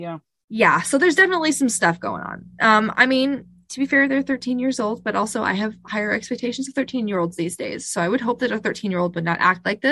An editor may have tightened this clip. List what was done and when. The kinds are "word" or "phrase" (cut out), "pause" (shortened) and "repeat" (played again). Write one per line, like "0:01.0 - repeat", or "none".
none